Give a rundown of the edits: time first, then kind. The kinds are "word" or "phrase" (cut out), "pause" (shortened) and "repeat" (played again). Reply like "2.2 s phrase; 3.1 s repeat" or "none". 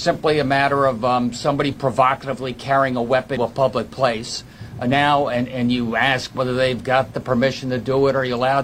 3.4 s word